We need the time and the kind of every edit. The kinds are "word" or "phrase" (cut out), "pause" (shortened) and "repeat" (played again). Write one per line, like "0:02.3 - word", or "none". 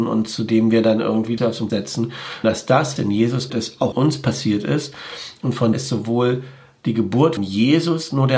0:01.4 - word
0:01.7 - word
0:02.4 - word
0:03.0 - word
0:03.5 - word
0:03.9 - word
0:05.7 - word
0:07.4 - word